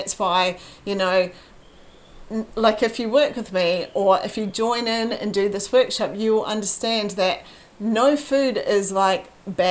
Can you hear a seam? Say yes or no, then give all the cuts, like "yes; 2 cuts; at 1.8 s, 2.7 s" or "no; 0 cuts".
no; 0 cuts